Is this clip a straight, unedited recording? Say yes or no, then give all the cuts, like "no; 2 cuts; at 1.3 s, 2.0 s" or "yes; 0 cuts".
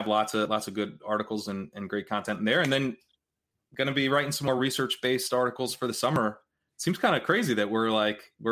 yes; 0 cuts